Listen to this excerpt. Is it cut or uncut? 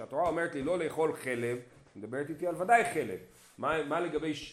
uncut